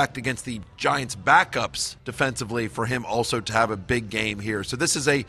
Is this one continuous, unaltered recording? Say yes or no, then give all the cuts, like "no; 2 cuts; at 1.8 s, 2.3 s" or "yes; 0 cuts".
no; 1 cut; at 2.0 s